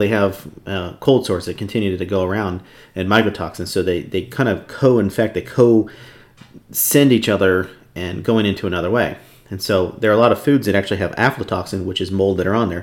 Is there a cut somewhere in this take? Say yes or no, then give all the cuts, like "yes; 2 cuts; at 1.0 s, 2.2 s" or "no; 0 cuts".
no; 0 cuts